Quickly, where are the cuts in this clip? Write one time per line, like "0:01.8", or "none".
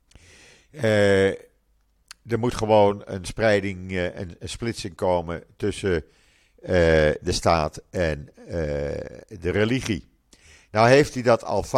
none